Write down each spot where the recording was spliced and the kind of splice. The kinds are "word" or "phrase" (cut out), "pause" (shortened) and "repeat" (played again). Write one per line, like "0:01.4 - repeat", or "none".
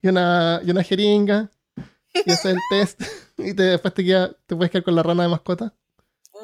none

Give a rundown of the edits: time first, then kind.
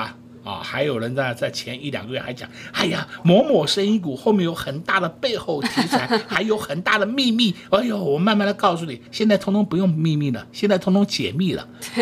0:09.1 - pause

